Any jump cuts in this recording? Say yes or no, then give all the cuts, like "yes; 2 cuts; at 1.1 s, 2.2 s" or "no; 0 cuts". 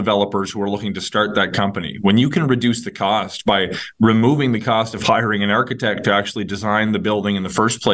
no; 0 cuts